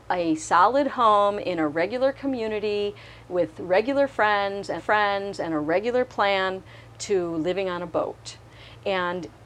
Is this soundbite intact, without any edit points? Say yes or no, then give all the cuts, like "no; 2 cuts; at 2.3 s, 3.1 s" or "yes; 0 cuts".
no; 1 cut; at 4.8 s